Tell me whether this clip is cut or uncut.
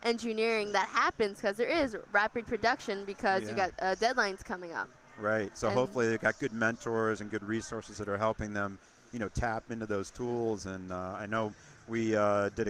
uncut